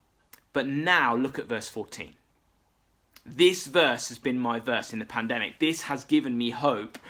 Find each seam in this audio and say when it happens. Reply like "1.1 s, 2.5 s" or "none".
none